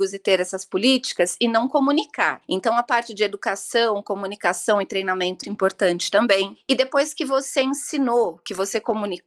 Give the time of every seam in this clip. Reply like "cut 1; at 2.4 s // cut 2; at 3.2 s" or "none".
cut 1; at 5.4 s